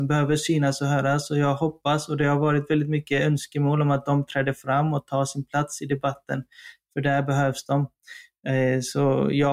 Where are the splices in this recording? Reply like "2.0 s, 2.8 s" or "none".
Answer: none